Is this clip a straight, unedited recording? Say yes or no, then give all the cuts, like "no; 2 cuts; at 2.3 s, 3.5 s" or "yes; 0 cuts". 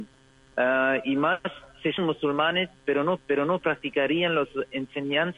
no; 2 cuts; at 2.0 s, 3.2 s